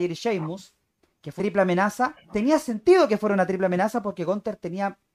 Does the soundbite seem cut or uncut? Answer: cut